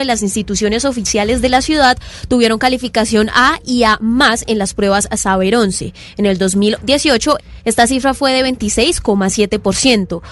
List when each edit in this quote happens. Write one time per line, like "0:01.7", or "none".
none

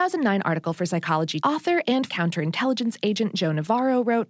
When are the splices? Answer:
0:01.4
0:02.1

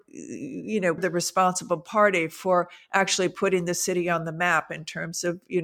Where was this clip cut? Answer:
0:01.0

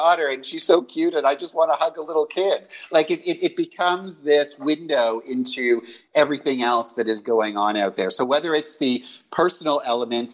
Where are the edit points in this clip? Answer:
none

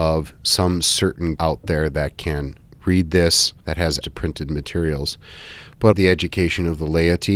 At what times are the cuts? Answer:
0:01.4
0:03.6
0:04.0
0:05.9

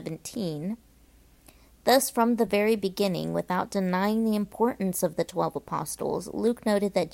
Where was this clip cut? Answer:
none

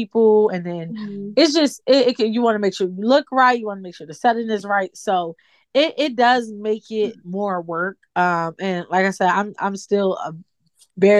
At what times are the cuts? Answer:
none

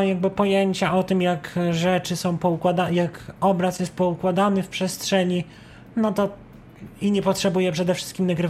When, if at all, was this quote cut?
none

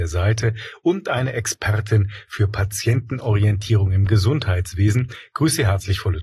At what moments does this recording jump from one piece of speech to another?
none

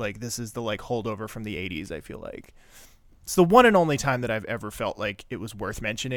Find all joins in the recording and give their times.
none

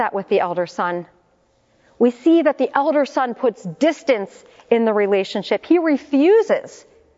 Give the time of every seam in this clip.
none

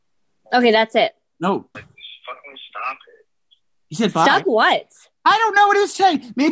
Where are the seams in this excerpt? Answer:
0:01.7

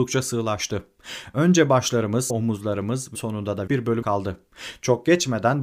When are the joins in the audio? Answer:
0:02.3
0:03.1
0:03.7
0:04.0

